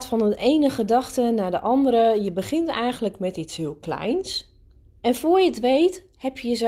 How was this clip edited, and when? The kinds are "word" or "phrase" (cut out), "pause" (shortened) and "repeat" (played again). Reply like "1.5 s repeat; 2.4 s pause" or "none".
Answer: none

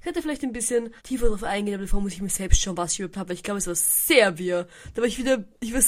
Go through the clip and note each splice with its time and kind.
1.0 s pause; 3.1 s word

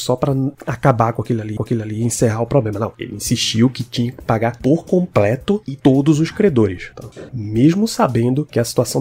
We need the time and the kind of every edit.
1.6 s repeat

